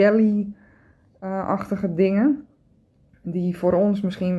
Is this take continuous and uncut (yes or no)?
yes